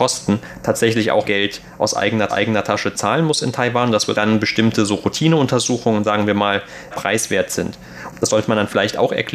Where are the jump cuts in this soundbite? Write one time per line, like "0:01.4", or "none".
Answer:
0:01.2
0:02.3
0:04.1
0:06.9